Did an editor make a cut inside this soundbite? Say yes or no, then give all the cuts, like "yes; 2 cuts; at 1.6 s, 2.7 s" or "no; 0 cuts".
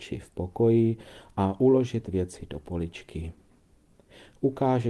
no; 0 cuts